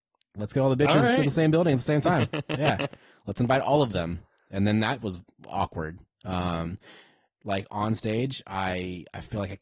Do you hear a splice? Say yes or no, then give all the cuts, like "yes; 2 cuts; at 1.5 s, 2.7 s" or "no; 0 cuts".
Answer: no; 0 cuts